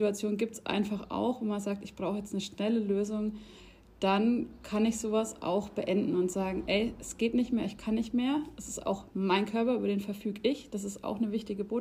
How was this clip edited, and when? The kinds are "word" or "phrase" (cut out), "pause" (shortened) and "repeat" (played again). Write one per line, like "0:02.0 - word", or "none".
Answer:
none